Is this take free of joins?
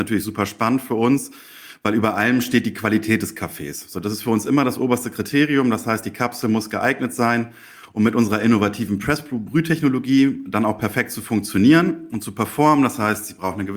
yes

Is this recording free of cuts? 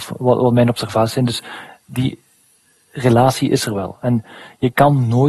yes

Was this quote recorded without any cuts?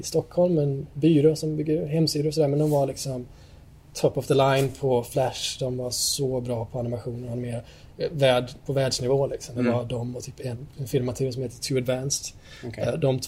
yes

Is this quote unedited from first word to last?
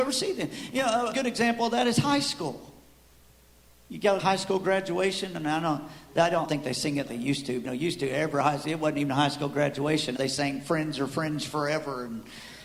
no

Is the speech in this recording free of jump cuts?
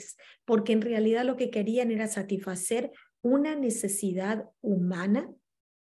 yes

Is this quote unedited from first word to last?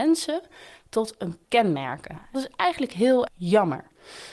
no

